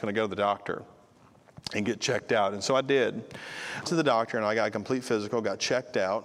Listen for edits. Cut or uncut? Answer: cut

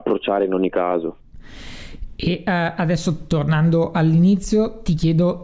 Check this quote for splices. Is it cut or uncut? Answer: uncut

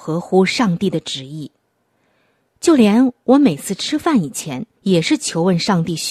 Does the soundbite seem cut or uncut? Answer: cut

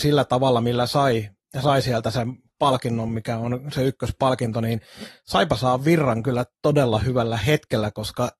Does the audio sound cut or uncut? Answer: uncut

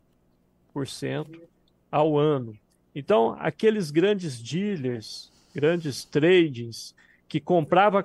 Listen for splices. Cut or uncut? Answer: uncut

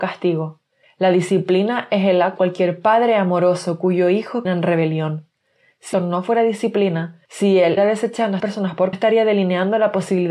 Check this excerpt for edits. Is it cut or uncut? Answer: cut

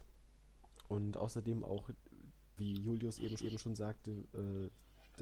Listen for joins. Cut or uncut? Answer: cut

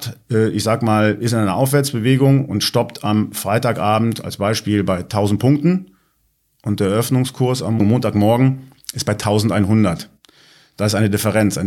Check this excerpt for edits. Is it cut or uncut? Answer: uncut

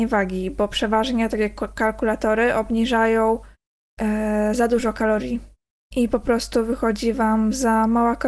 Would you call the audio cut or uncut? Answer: uncut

